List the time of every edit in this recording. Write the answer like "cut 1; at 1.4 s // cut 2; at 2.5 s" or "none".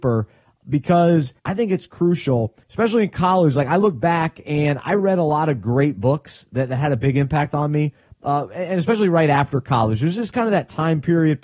cut 1; at 1.4 s // cut 2; at 2.6 s

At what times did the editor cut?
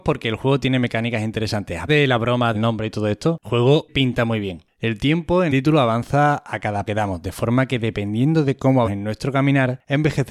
cut 1; at 1.9 s // cut 2; at 2.5 s // cut 3; at 3.4 s // cut 4; at 3.9 s // cut 5; at 5.5 s // cut 6; at 6.9 s // cut 7; at 8.8 s

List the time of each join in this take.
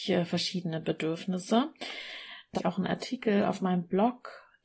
cut 1; at 2.6 s

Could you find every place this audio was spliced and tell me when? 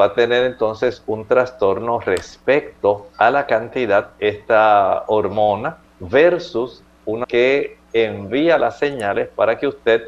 cut 1; at 3.1 s // cut 2; at 4.2 s // cut 3; at 5.9 s // cut 4; at 7.2 s

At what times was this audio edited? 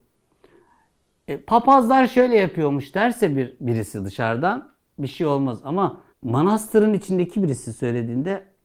cut 1; at 1.4 s // cut 2; at 6.1 s

